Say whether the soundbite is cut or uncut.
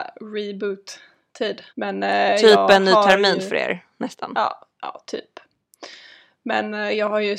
cut